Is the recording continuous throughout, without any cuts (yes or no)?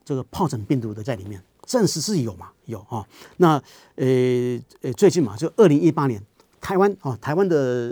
no